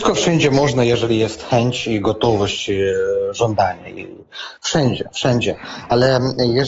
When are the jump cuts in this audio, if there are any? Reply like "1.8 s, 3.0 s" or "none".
none